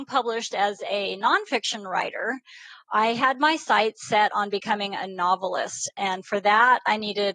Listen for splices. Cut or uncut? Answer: uncut